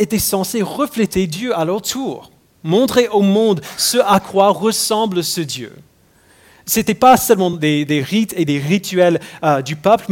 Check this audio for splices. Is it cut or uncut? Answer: uncut